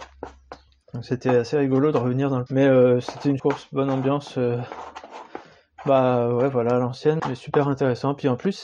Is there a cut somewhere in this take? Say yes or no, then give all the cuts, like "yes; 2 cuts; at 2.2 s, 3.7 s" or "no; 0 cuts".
yes; 3 cuts; at 2.5 s, 3.4 s, 7.2 s